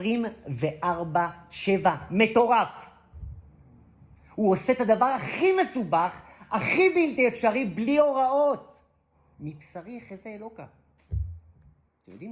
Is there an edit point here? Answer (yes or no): no